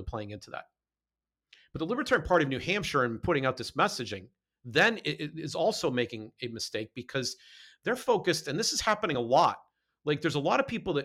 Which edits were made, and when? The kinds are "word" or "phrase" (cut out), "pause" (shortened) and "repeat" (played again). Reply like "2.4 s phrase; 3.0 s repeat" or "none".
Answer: none